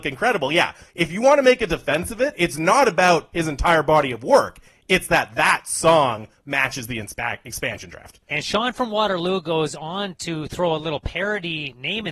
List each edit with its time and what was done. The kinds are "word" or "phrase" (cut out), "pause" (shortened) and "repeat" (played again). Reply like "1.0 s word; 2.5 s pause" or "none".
none